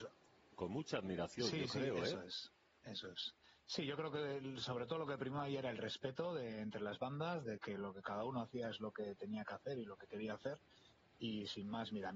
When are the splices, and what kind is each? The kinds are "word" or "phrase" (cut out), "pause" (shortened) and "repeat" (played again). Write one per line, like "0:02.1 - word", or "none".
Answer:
none